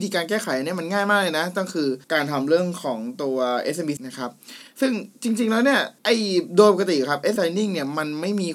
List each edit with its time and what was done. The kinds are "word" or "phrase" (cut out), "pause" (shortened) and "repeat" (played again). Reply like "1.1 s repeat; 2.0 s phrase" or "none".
2.0 s pause; 4.0 s word; 6.0 s pause; 7.4 s word

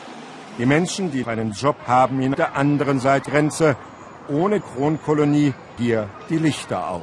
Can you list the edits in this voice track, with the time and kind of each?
1.2 s word; 1.8 s word; 2.3 s word; 3.3 s word; 4.6 s word; 5.8 s word

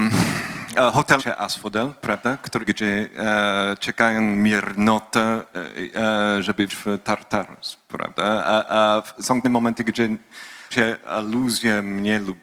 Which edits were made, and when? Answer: 1.2 s word; 2.6 s phrase; 6.7 s word; 9.4 s word; 10.7 s word

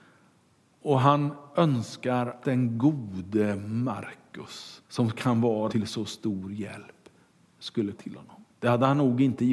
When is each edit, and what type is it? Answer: 2.4 s word; 4.9 s pause; 5.7 s word; 7.9 s word; 8.5 s pause

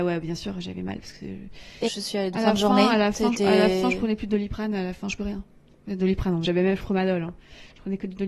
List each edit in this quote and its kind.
1.8 s phrase; 2.3 s word; 5.2 s phrase; 6.4 s word; 6.8 s phrase

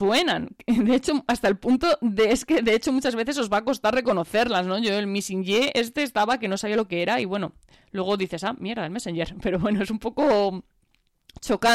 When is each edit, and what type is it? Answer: none

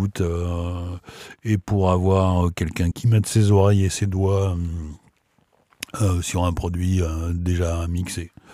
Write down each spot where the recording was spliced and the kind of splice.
2.9 s word

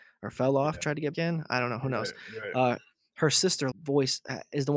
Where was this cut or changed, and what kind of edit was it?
1.1 s word; 3.7 s word

